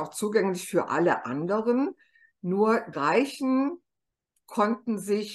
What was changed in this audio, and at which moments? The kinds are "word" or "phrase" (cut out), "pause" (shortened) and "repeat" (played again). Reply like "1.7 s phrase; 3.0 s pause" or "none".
2.9 s word